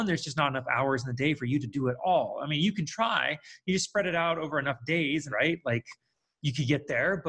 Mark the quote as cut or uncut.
cut